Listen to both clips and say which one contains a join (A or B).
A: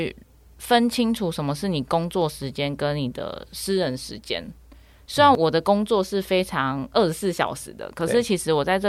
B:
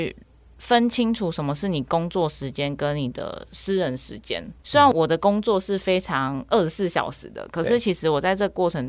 B